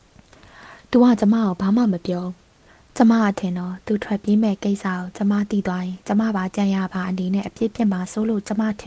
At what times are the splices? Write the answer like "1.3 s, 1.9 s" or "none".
none

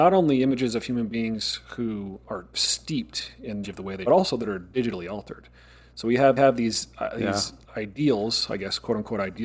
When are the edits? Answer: 2.2 s, 2.5 s, 3.6 s, 4.1 s, 6.4 s, 7.6 s

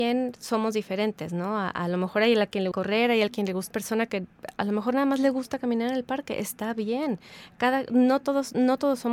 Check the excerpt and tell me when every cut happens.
2.7 s, 3.7 s

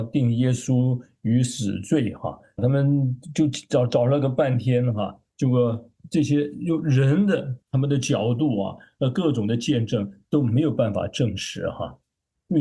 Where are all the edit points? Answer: 2.6 s, 5.3 s, 7.6 s

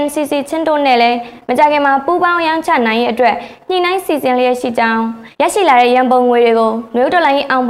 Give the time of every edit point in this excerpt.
5.3 s

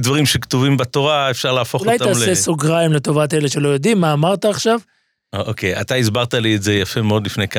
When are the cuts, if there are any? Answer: none

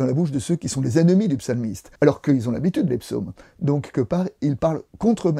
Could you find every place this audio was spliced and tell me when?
2.0 s, 2.9 s, 3.9 s

